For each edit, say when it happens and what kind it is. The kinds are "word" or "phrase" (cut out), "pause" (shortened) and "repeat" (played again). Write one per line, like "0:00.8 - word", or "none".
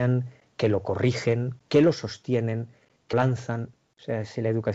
0:03.1 - word